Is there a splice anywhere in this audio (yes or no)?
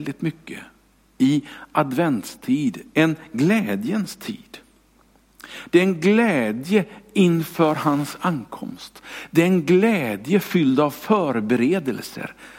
no